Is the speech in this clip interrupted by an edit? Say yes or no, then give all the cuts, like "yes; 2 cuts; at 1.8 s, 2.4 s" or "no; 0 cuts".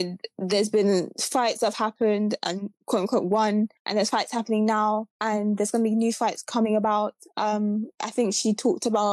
yes; 2 cuts; at 3.8 s, 5.1 s